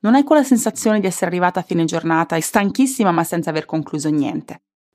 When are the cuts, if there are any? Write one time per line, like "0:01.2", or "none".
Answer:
none